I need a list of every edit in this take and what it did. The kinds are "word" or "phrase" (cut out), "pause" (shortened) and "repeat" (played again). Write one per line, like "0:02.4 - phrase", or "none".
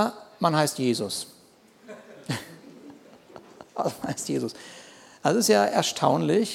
none